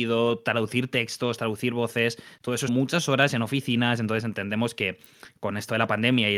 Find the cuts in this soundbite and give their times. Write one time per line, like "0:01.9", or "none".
0:02.7